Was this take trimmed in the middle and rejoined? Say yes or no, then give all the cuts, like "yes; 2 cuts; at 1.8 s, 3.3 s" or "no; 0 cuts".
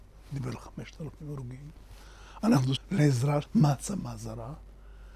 yes; 2 cuts; at 2.8 s, 3.4 s